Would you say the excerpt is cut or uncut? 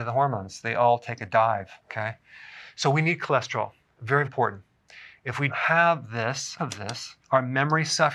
cut